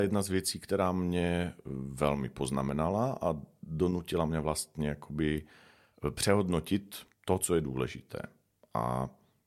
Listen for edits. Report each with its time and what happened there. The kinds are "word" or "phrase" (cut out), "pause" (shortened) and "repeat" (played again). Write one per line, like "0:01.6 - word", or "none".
none